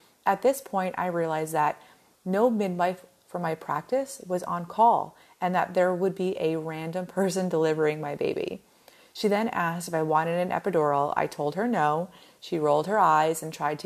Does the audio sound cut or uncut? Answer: uncut